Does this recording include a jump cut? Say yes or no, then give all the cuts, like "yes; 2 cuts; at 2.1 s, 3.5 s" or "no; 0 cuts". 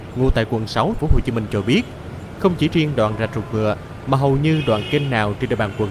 yes; 1 cut; at 1.0 s